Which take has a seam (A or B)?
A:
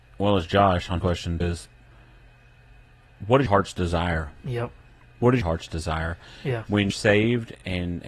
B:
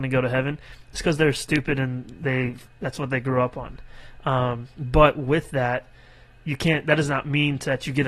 A